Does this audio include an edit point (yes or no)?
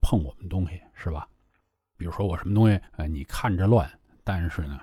yes